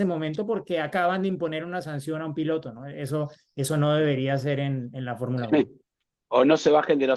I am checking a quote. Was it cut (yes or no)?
no